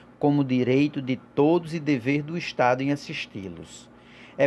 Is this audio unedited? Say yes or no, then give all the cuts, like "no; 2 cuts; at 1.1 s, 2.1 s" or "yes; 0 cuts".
yes; 0 cuts